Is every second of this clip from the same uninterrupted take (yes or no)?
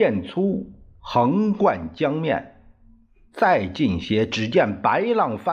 yes